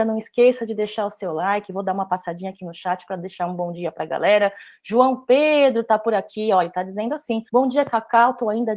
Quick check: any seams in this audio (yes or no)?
yes